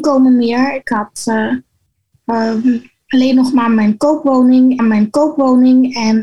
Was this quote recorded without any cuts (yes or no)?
no